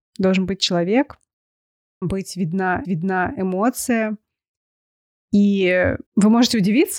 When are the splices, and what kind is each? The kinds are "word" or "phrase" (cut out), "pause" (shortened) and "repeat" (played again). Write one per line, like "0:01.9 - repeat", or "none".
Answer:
0:02.0 - word
0:02.8 - repeat
0:06.1 - pause